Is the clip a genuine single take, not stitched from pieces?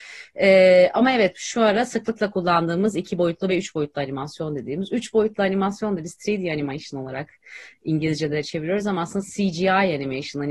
yes; 0 cuts

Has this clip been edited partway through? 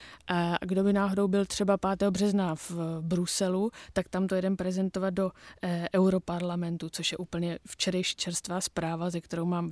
no; 0 cuts

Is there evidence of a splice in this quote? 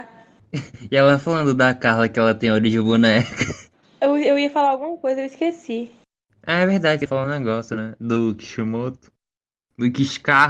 no; 0 cuts

